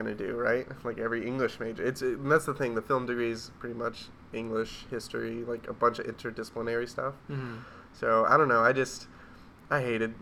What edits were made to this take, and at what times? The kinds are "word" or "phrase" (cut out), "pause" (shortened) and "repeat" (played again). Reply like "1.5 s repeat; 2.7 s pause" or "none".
none